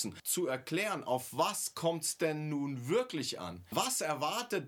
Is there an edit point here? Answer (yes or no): no